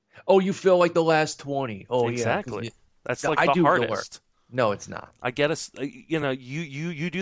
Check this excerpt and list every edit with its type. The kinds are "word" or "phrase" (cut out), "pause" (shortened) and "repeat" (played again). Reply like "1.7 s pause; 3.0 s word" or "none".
none